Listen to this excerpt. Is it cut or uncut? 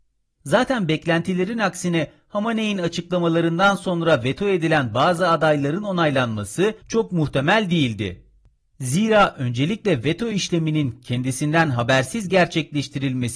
uncut